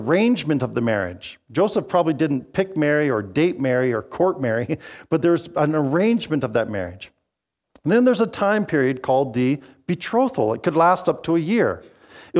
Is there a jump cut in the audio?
no; 0 cuts

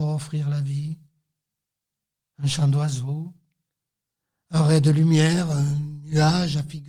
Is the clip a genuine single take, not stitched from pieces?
yes; 0 cuts

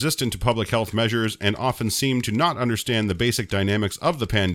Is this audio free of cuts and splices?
yes; 0 cuts

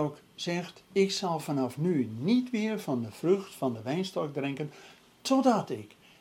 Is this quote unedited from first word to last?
yes; 0 cuts

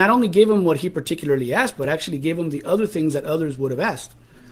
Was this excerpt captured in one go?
yes; 0 cuts

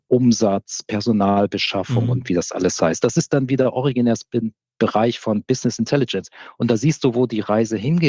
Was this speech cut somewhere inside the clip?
no; 0 cuts

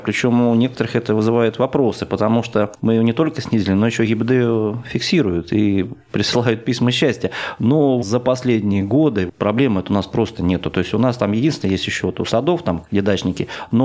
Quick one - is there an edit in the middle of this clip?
no; 0 cuts

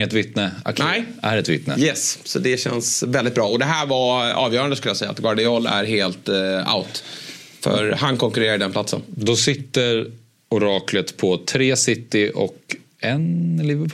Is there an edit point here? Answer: no; 0 cuts

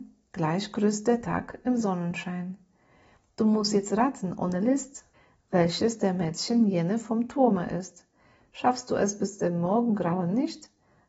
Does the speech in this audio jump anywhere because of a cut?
no; 0 cuts

